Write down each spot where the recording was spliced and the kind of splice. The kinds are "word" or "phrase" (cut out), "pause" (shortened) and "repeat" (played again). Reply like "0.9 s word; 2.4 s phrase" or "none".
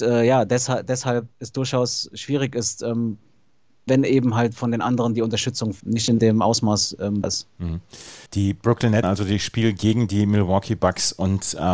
1.3 s pause; 3.9 s word; 5.8 s word; 7.2 s word; 8.3 s pause; 9.0 s word